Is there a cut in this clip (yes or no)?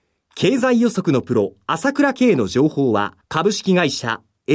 yes